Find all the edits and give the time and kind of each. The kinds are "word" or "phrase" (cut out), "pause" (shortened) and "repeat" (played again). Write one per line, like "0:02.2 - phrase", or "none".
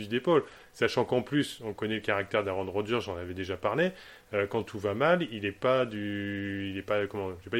none